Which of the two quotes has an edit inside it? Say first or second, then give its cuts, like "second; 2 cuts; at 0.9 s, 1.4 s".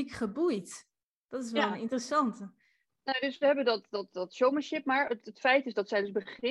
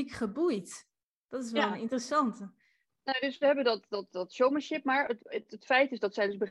first; 1 cut; at 5.2 s